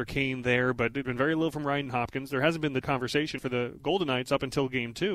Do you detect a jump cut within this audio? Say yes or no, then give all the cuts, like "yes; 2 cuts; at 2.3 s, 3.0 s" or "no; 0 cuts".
yes; 4 cuts; at 1.0 s, 1.9 s, 2.8 s, 3.4 s